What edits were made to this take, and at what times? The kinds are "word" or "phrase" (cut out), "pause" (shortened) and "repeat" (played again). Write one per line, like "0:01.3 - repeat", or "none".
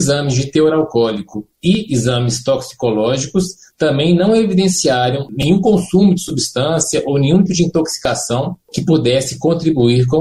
0:07.5 - word